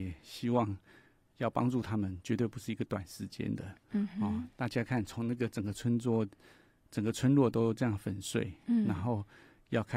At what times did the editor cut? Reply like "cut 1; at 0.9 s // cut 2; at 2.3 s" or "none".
none